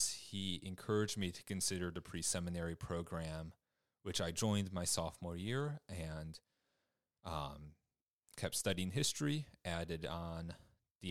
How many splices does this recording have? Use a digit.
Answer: 0